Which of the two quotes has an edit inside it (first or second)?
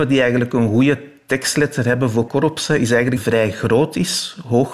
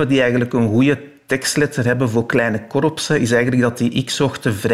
first